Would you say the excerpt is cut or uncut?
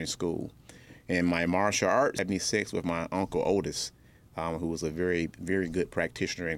uncut